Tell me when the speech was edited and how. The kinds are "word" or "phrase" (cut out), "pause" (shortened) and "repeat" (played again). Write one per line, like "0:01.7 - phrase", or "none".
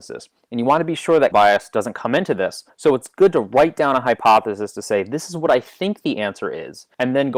0:01.3 - word